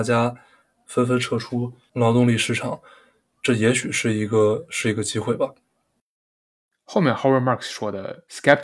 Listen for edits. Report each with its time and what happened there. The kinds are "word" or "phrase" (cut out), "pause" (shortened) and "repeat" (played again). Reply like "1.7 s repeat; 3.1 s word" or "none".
none